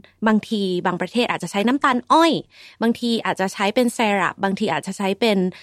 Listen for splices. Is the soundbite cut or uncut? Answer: uncut